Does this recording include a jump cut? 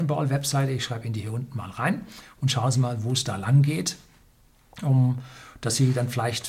no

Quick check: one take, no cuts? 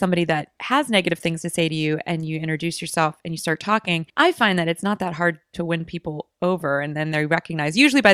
no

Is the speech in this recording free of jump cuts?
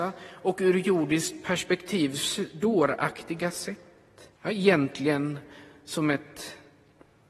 no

